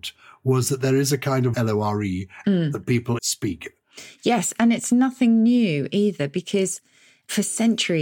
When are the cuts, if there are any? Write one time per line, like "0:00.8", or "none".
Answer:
0:01.5
0:02.4
0:03.2